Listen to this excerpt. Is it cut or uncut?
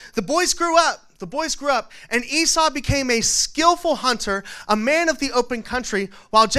uncut